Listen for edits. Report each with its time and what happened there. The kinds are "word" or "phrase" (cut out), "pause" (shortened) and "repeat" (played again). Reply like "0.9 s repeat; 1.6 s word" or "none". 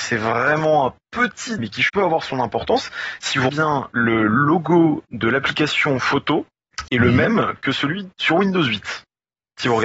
1.6 s word; 1.9 s word; 3.5 s word; 6.9 s word